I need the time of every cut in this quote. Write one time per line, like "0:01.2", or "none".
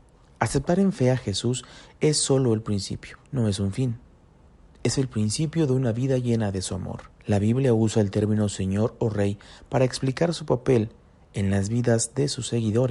0:03.2
0:07.2